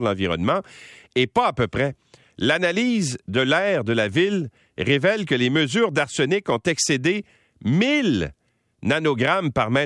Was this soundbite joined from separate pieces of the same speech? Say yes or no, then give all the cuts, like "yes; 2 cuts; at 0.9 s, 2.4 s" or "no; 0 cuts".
no; 0 cuts